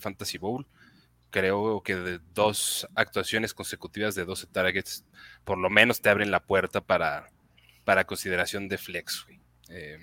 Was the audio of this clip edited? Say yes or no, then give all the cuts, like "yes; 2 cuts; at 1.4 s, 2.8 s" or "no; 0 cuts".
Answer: no; 0 cuts